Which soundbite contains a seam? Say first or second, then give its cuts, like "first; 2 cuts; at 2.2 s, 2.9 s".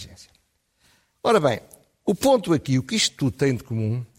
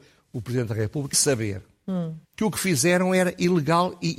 second; 2 cuts; at 1.1 s, 2.2 s